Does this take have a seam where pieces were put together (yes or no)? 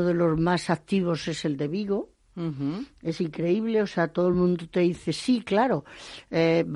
no